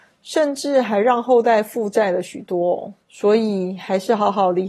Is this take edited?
yes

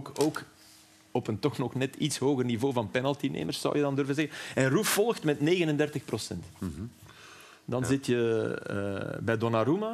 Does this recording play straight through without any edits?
yes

